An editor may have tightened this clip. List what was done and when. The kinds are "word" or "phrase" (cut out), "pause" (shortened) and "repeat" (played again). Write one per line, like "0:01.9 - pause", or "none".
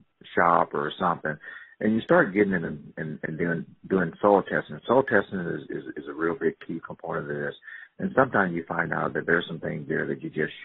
none

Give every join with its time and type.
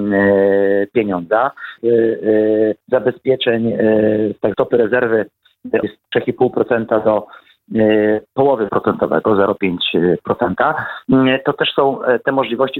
0:01.8 - word
0:02.8 - pause
0:04.5 - word
0:05.8 - word
0:08.7 - word

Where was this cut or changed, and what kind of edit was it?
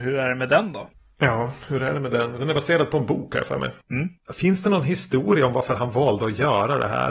none

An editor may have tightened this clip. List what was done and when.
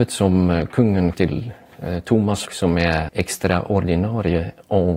0:01.1 - word
0:02.5 - word
0:03.1 - word

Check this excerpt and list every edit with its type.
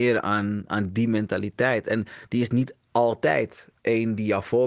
0:02.8 - pause

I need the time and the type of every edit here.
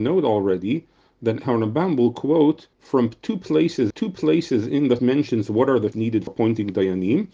0:01.4 - word
0:02.7 - pause
0:03.9 - repeat
0:05.0 - phrase
0:05.9 - word
0:06.3 - word

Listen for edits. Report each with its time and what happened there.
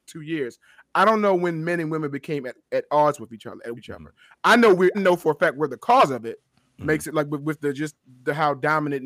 0:03.8 - word
0:04.9 - word

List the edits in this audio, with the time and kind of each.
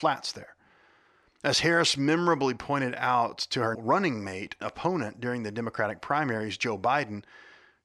0:03.7 - word
0:04.6 - word

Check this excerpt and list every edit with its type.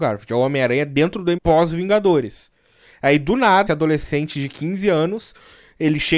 0:01.4 - word
0:03.7 - word

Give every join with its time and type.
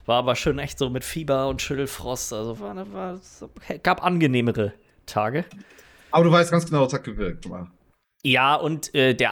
0:02.6 - word
0:07.4 - word

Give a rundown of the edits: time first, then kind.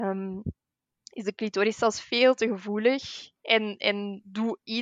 none

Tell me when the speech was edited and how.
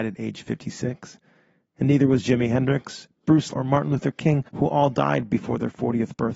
0:03.5 - word
0:04.5 - pause

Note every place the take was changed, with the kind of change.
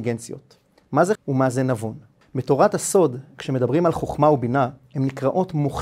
0:01.1 - word

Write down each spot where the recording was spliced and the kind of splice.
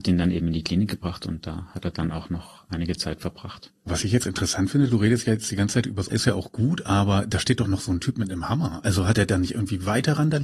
0:04.2 - word
0:06.1 - word

